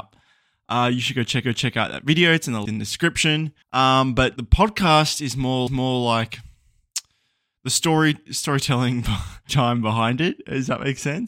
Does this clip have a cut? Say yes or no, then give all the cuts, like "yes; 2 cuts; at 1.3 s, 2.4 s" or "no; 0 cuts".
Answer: yes; 7 cuts; at 1.4 s, 2.7 s, 3.6 s, 4.4 s, 5.7 s, 8.3 s, 9.5 s